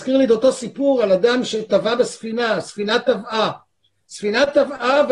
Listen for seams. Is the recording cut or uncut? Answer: uncut